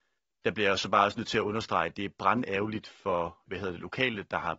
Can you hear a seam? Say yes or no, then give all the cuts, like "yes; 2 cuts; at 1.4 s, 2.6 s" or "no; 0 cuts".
yes; 1 cut; at 3.5 s